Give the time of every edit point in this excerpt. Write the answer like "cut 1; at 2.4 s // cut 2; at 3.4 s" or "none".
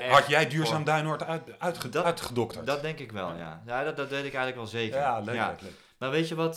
none